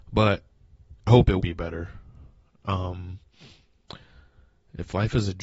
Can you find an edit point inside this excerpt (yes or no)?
yes